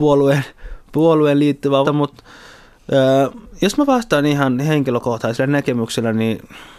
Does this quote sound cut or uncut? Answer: cut